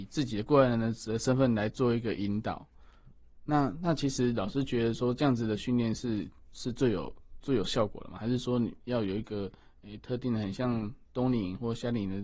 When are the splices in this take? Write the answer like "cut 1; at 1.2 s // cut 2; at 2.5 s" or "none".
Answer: none